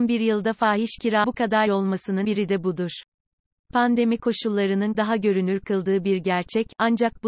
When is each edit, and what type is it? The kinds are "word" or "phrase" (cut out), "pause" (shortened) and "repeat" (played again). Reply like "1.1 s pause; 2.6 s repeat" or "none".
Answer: 1.2 s word; 1.7 s word; 2.2 s word; 4.9 s word